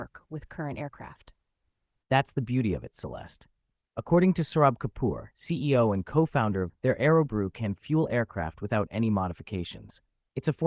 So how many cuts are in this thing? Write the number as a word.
one